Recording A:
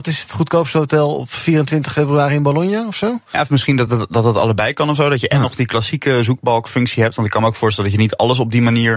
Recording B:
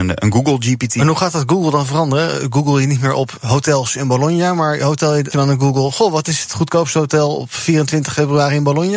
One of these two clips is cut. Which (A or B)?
B